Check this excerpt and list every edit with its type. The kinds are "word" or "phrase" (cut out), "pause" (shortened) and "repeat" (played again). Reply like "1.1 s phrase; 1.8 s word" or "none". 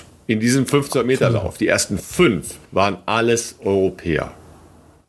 2.6 s pause